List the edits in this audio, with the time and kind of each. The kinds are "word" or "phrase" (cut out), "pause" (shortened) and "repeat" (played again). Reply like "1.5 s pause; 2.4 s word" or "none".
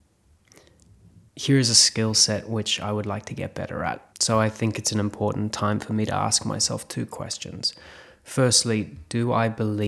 1.3 s pause; 4.1 s pause